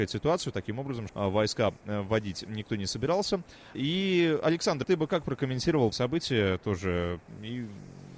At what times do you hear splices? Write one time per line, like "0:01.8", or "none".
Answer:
0:01.1
0:03.7
0:04.8
0:05.9